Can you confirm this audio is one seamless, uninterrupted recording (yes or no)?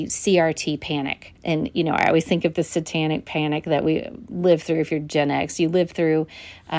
no